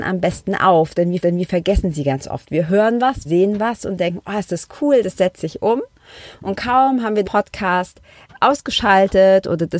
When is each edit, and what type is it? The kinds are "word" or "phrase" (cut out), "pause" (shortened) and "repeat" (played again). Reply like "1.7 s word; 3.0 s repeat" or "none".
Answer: 1.2 s repeat; 3.2 s word; 7.2 s word